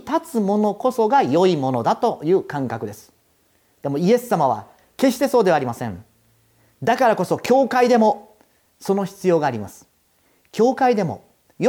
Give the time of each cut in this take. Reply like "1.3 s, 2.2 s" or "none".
none